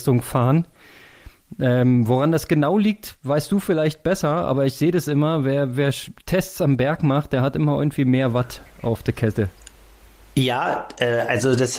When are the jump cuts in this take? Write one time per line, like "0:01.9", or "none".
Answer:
none